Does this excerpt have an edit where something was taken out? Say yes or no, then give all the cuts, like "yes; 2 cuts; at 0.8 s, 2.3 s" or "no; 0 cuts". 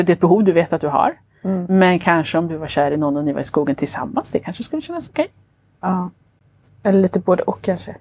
no; 0 cuts